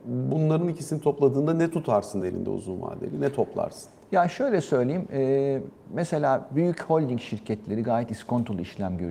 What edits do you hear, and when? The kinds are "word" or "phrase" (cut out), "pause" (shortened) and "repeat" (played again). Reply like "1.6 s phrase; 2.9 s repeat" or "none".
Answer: none